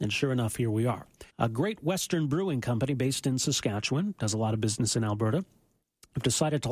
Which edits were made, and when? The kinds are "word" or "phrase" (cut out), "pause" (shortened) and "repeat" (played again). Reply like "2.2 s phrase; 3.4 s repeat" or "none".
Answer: 1.3 s pause